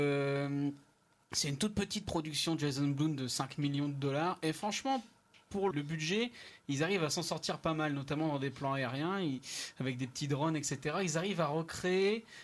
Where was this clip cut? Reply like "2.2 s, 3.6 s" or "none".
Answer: 5.7 s